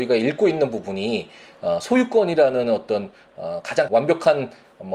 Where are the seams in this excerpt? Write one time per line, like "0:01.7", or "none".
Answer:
0:03.9